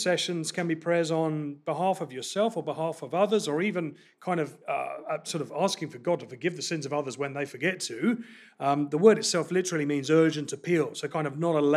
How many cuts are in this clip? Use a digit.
1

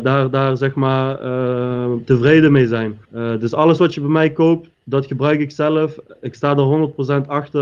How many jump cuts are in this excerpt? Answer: 2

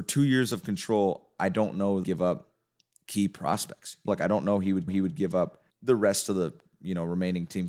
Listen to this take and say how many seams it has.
5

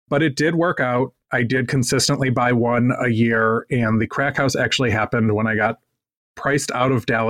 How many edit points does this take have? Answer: 0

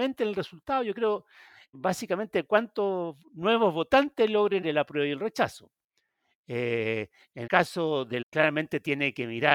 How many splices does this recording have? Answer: 4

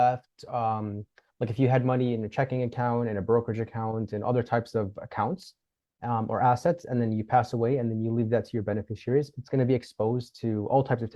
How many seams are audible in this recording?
0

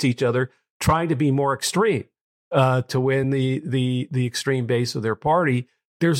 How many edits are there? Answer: 0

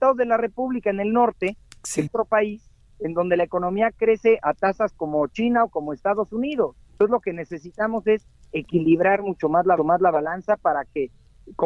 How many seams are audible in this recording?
4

